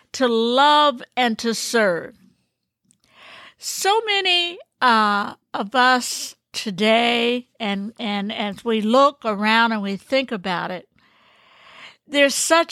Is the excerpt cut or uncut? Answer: uncut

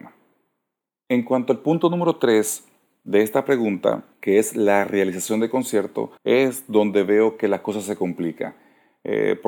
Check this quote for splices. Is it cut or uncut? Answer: cut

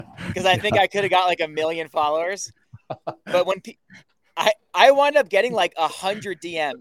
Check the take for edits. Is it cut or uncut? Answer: uncut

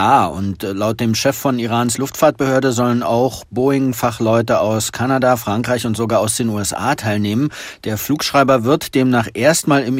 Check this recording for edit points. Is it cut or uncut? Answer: uncut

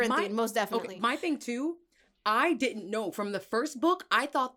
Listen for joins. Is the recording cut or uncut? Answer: uncut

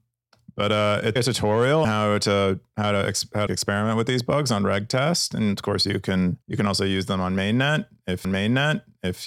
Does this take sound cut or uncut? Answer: cut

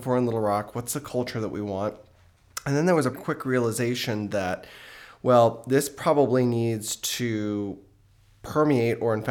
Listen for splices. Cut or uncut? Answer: cut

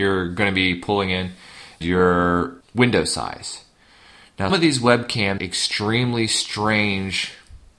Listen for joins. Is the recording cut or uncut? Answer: cut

